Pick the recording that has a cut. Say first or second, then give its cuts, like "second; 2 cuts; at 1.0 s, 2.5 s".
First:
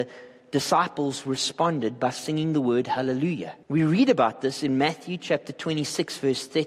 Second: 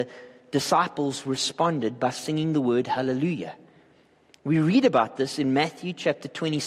first; 1 cut; at 3.6 s